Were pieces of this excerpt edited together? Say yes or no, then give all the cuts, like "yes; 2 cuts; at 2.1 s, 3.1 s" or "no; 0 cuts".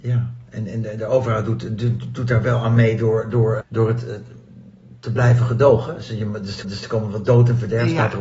yes; 2 cuts; at 3.6 s, 6.6 s